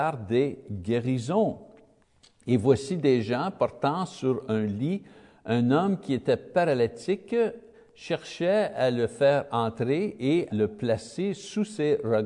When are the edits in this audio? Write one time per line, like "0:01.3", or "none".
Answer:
0:10.5